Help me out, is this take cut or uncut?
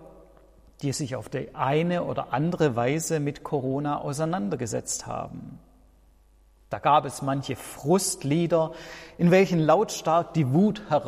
uncut